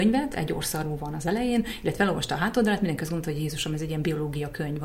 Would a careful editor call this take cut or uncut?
uncut